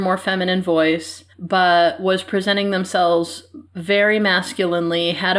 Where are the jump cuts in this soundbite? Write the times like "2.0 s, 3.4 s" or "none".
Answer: 1.3 s, 3.7 s

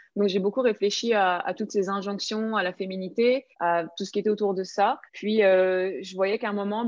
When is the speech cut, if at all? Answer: 3.5 s, 5.1 s

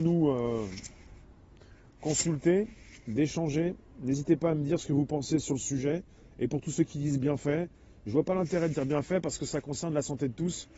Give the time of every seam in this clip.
none

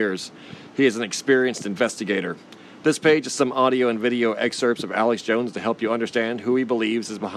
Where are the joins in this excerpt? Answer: none

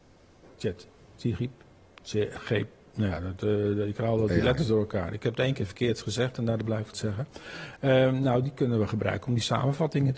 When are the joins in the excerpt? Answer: 6.9 s

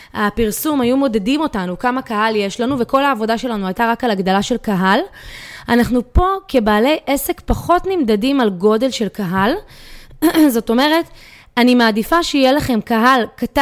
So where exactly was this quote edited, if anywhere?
none

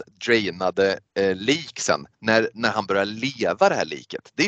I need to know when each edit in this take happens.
2.1 s

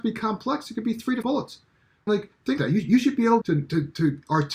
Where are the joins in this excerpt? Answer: 1.2 s, 2.1 s, 2.6 s, 3.4 s

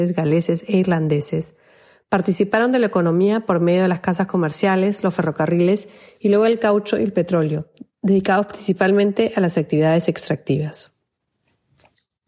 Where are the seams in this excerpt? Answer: none

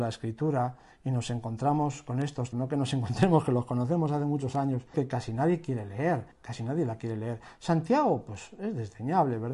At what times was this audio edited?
2.5 s, 4.9 s, 6.3 s

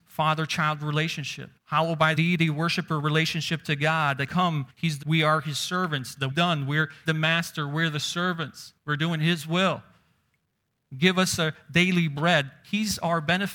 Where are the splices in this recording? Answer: 1.6 s, 2.2 s, 4.3 s, 4.7 s, 5.0 s, 6.3 s, 7.1 s, 8.8 s

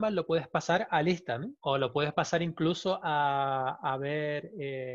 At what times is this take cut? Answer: 1.6 s

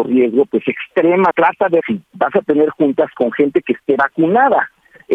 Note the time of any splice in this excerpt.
1.3 s, 1.8 s

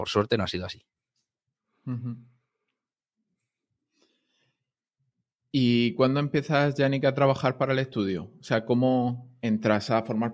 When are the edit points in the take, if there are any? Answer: none

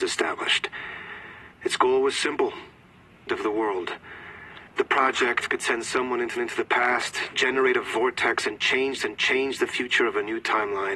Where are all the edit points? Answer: 1.5 s, 3.3 s, 4.7 s, 6.4 s, 9.0 s

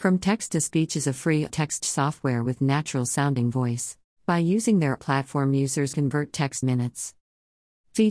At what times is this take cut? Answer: 1.5 s, 1.8 s, 4.1 s, 5.0 s, 5.9 s, 6.6 s

